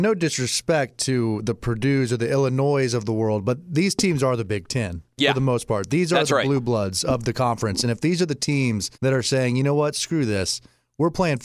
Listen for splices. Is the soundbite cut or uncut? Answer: cut